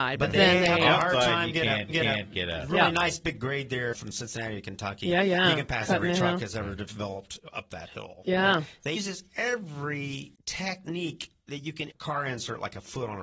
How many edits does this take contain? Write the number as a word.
five